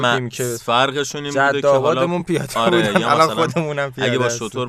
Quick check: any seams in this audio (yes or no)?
no